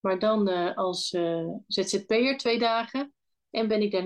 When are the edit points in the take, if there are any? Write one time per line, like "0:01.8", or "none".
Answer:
none